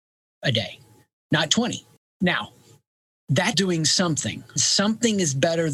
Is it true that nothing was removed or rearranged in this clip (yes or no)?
no